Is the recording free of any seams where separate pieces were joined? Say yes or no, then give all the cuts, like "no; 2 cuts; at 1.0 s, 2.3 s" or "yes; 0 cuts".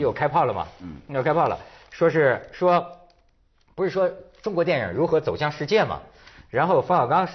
yes; 0 cuts